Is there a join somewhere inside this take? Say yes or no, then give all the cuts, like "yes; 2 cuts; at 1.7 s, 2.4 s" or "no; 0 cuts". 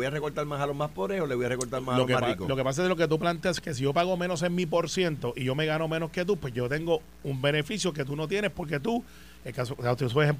no; 0 cuts